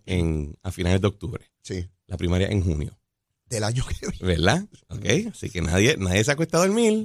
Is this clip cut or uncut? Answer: uncut